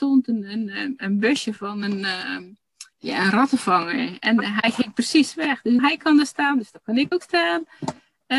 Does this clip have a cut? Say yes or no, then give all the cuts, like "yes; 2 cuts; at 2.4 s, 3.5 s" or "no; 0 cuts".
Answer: yes; 3 cuts; at 2.9 s, 5.8 s, 7.1 s